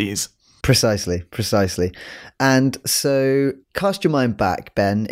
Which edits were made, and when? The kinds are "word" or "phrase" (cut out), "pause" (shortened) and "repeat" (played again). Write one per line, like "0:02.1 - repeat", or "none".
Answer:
0:03.6 - pause